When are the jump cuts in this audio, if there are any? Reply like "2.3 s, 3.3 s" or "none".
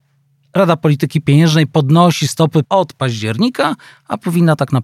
2.6 s